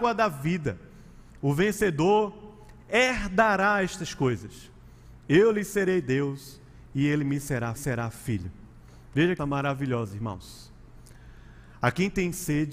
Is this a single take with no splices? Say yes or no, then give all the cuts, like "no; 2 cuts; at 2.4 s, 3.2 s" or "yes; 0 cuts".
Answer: no; 2 cuts; at 7.8 s, 9.4 s